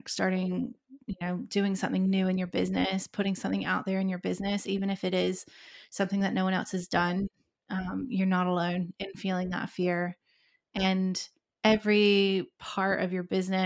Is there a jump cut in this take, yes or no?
no